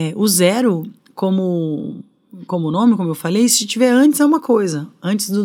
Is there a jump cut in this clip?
no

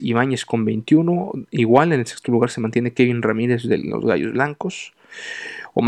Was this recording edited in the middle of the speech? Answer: no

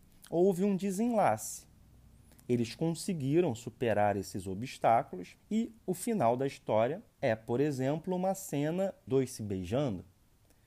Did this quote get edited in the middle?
yes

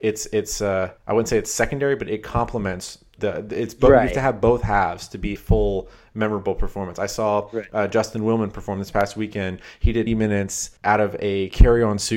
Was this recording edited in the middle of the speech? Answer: yes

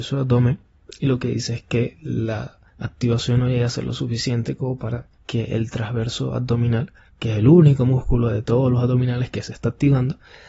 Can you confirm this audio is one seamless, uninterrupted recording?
no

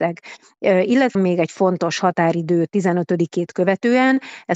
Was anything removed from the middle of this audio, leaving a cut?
yes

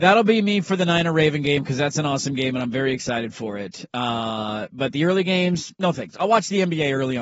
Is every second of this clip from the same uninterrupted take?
yes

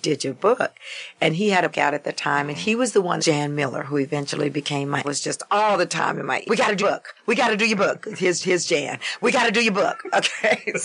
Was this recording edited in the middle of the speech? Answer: yes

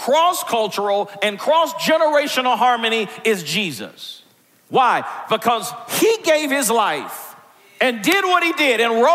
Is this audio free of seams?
yes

